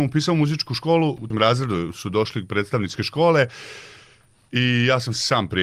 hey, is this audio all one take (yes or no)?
no